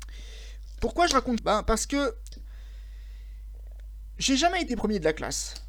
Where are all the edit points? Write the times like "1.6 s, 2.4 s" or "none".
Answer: 1.4 s